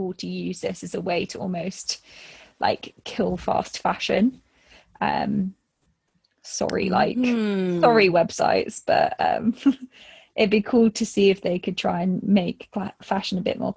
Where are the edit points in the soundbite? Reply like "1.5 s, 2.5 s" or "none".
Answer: none